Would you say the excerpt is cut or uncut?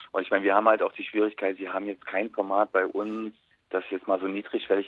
uncut